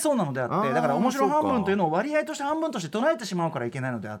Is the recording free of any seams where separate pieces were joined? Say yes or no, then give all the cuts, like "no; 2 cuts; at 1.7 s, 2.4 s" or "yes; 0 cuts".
yes; 0 cuts